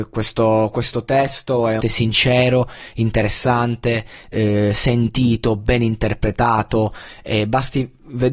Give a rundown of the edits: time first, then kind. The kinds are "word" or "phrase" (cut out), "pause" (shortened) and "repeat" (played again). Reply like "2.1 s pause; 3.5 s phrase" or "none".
1.8 s phrase